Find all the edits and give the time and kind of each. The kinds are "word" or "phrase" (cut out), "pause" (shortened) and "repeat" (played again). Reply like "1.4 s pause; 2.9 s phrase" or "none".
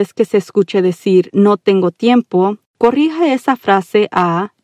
none